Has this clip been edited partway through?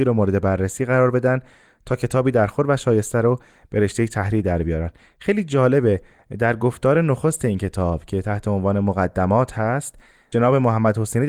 no; 0 cuts

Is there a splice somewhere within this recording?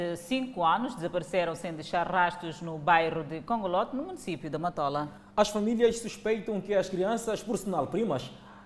no; 0 cuts

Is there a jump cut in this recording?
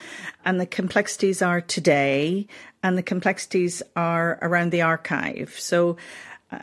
no; 0 cuts

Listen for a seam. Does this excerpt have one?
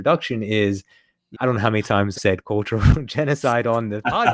yes; 2 cuts; at 1.3 s, 2.1 s

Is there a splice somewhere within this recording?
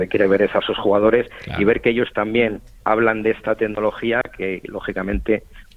yes; 1 cut; at 2.8 s

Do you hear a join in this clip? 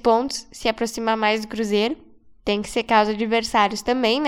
no; 0 cuts

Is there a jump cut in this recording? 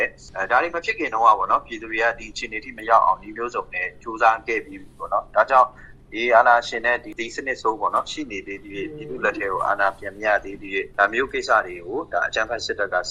yes; 1 cut; at 10.9 s

